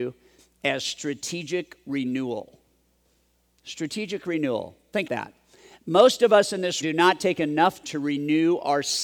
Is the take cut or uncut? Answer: cut